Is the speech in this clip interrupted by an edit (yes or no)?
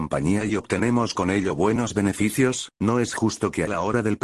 no